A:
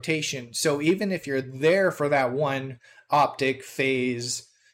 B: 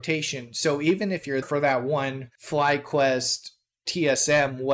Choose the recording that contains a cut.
B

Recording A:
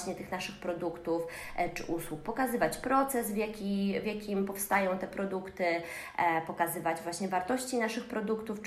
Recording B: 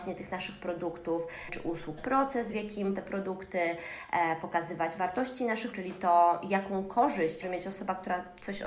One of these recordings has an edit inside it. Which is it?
B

